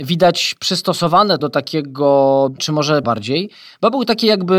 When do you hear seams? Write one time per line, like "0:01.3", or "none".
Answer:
0:01.4
0:02.6
0:03.0

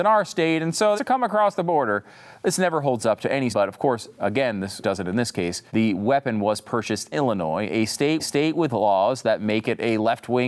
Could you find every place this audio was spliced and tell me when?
0:01.0
0:03.5
0:04.8
0:05.7
0:07.1
0:08.2

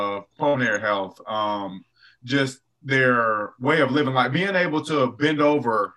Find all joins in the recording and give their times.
none

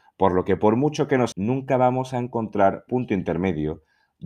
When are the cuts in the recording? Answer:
0:01.3
0:02.9

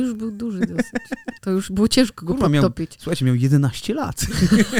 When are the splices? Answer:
0:01.4

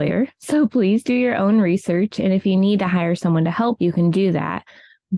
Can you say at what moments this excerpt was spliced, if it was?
0:03.8

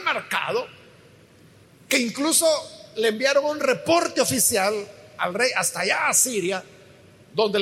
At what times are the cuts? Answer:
none

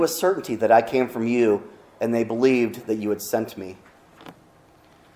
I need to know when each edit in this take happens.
none

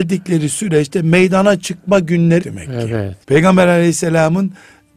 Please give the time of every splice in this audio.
0:02.4
0:03.2

